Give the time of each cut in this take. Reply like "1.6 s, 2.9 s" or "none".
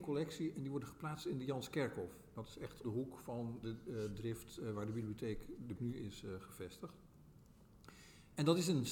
2.8 s, 3.6 s, 5.8 s